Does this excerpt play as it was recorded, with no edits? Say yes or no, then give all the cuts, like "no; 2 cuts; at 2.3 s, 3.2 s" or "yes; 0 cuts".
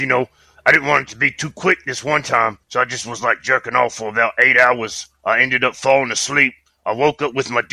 no; 1 cut; at 2.6 s